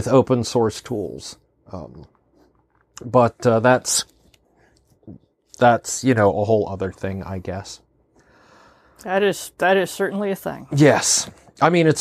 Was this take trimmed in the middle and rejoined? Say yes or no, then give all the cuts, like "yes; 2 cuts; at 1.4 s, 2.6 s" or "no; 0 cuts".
no; 0 cuts